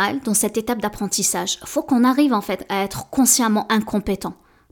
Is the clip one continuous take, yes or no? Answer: yes